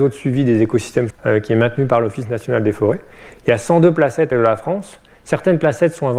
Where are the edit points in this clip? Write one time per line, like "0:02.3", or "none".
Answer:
0:01.1
0:04.3